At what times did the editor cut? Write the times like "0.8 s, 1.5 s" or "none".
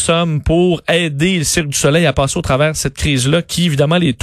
none